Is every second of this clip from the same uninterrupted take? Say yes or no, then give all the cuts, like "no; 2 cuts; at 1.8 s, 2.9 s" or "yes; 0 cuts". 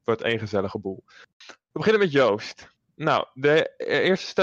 yes; 0 cuts